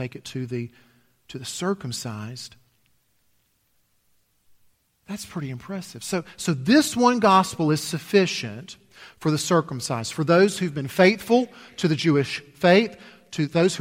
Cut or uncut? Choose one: uncut